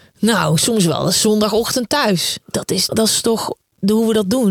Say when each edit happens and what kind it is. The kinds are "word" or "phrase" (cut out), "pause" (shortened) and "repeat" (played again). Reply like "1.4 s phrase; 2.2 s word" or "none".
2.9 s word